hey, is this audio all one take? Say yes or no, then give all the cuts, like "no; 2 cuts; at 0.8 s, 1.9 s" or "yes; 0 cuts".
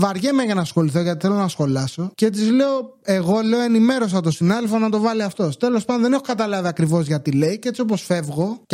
yes; 0 cuts